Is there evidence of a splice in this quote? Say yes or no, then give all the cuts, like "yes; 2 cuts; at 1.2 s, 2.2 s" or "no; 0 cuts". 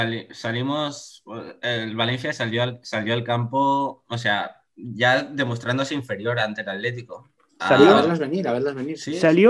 no; 0 cuts